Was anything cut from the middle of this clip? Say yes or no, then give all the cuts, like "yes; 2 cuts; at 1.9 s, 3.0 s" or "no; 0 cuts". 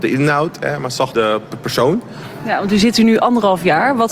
yes; 1 cut; at 1.1 s